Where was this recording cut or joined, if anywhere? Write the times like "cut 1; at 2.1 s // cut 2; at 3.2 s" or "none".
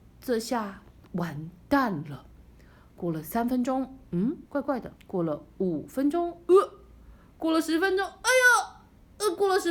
cut 1; at 0.9 s // cut 2; at 4.5 s // cut 3; at 5.0 s